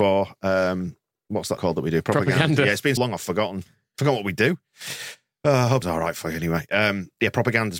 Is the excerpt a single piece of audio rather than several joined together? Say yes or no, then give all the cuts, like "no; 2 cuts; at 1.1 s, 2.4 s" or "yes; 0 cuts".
no; 3 cuts; at 1.6 s, 3.0 s, 5.8 s